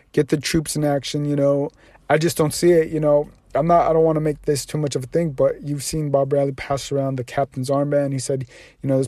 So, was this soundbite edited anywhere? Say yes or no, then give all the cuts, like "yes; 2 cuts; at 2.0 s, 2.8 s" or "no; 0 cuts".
no; 0 cuts